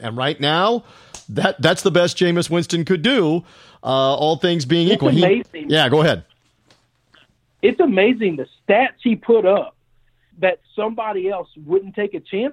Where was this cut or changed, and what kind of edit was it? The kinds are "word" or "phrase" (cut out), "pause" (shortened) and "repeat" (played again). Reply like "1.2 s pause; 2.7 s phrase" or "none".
none

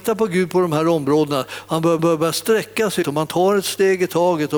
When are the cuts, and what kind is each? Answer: 2.0 s repeat; 3.0 s word

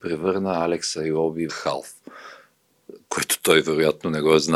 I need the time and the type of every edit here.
1.5 s phrase

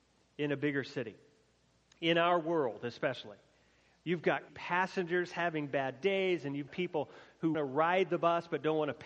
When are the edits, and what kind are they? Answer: 4.5 s word; 6.7 s word; 7.5 s word

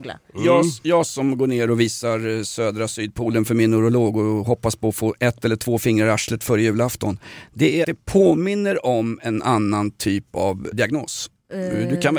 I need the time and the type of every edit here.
7.8 s phrase; 10.7 s word

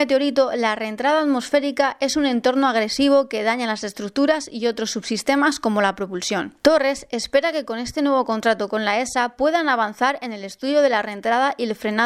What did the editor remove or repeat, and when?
6.6 s pause

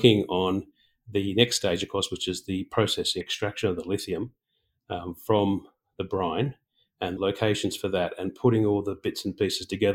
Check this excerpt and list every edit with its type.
3.2 s phrase; 7.2 s word

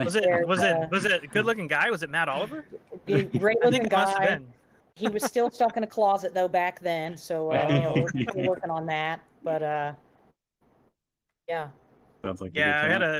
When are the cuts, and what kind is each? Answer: none

